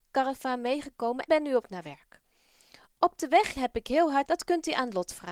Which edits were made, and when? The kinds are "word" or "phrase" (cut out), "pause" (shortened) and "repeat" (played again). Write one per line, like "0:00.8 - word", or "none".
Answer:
0:01.3 - word
0:01.6 - word
0:03.6 - word
0:04.3 - word